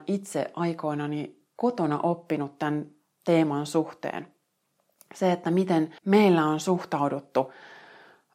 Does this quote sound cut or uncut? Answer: cut